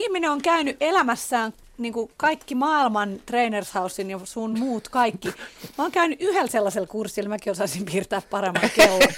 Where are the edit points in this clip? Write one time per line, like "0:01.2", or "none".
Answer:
none

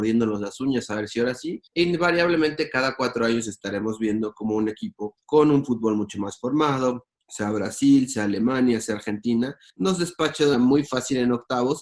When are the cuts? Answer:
0:01.7
0:10.5

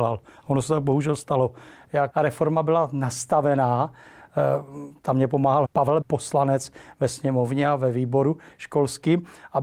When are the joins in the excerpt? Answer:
0:02.1
0:05.6
0:06.0

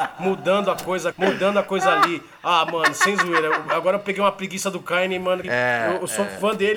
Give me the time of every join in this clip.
0:01.1
0:05.4

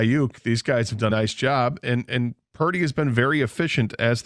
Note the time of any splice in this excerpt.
0:01.1

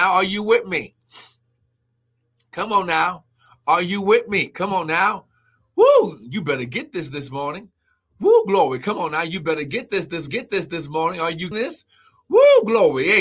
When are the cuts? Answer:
0:10.3
0:11.5

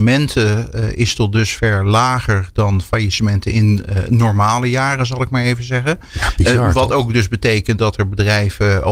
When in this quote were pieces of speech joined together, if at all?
none

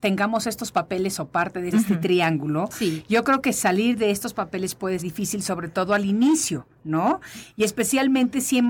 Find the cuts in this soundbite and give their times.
0:01.7
0:05.0

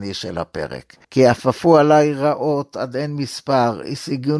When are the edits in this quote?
0:01.0

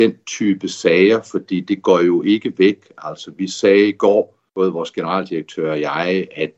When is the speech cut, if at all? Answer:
0:04.5

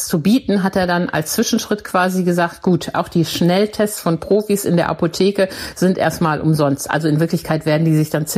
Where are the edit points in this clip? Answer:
0:02.9

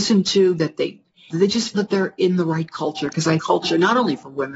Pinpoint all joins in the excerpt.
0:01.3
0:01.7
0:03.4

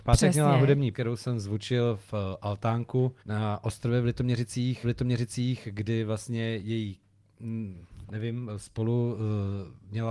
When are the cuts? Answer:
0:00.9
0:03.2
0:04.8
0:08.1

